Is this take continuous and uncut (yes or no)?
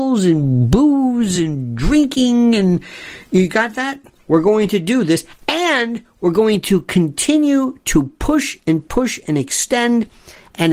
yes